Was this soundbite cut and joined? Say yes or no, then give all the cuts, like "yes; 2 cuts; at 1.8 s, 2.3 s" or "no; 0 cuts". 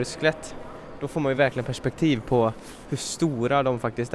no; 0 cuts